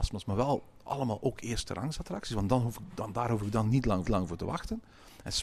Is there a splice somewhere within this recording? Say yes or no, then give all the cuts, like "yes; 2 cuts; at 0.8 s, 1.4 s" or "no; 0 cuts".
yes; 1 cut; at 4.0 s